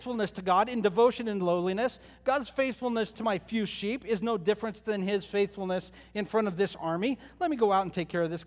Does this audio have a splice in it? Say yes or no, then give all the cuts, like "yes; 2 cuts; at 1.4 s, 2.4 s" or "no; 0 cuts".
yes; 1 cut; at 3.1 s